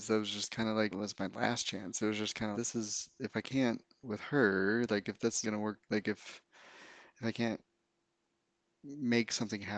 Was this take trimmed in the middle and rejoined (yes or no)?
yes